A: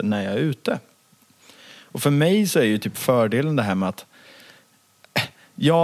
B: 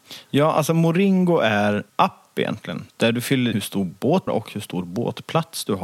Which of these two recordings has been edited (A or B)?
B